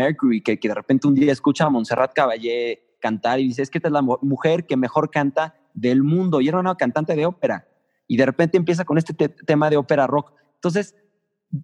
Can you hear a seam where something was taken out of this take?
no; 0 cuts

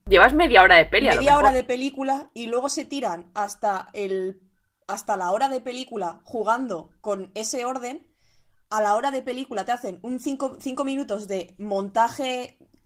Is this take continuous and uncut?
yes; 0 cuts

